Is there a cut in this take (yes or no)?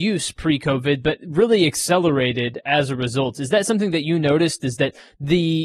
no